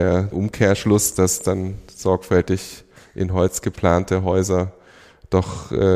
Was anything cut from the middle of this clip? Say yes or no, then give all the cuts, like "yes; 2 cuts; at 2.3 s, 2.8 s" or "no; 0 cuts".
no; 0 cuts